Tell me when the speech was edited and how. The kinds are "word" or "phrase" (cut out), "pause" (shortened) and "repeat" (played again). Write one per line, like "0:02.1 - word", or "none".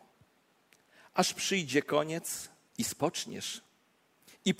0:02.7 - pause